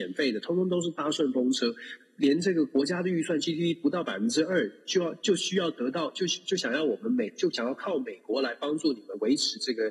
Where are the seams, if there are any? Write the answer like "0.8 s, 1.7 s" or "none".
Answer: none